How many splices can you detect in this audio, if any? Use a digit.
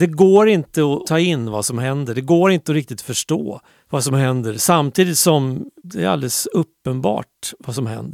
3